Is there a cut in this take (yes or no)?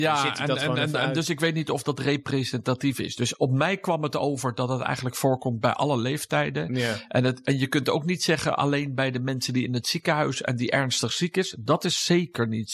no